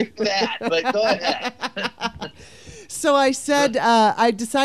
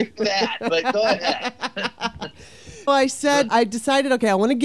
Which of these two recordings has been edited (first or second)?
second